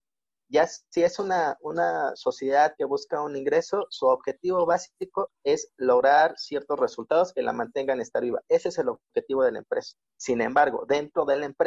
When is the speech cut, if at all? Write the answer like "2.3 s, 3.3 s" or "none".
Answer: 10.1 s